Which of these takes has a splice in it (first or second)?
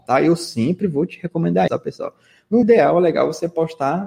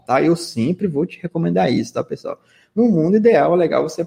first